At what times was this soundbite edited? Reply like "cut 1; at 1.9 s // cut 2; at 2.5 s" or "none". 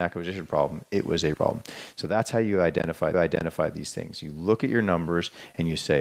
cut 1; at 1.3 s // cut 2; at 3.1 s